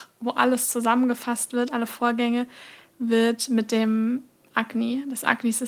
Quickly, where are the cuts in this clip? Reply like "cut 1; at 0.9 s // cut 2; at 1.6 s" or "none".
none